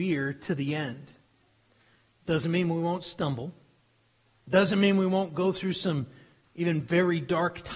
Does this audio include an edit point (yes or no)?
no